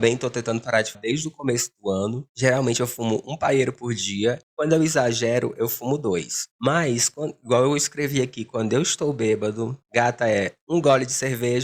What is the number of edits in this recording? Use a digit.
4